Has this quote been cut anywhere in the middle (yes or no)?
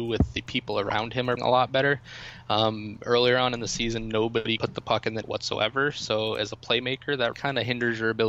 yes